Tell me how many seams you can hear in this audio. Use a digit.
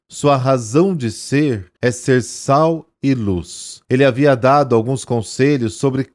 2